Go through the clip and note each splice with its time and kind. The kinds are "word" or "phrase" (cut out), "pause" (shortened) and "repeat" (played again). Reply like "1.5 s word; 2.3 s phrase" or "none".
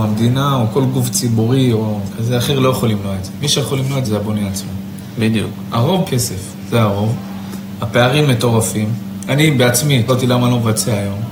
4.0 s word; 6.1 s phrase; 10.1 s word

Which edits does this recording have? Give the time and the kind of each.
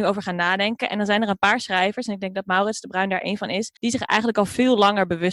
3.8 s pause

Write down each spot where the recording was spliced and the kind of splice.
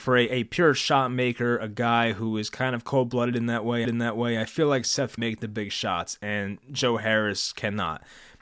3.8 s repeat; 5.2 s phrase

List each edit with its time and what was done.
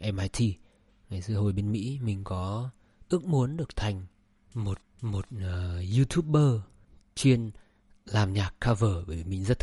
3.7 s word; 4.8 s repeat

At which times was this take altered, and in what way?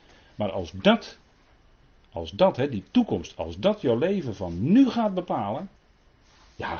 none

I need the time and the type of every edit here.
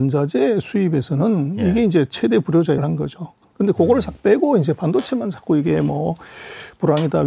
2.8 s word

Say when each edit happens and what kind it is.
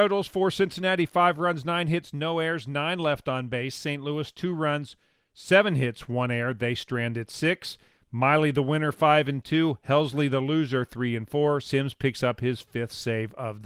none

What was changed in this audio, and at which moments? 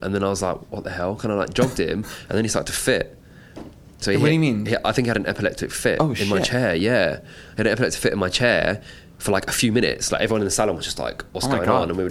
none

